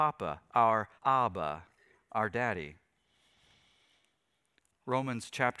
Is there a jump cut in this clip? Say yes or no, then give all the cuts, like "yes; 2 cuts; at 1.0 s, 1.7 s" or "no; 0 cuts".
yes; 1 cut; at 1.0 s